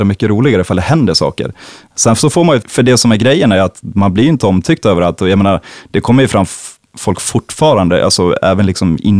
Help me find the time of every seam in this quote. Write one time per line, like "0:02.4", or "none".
0:02.6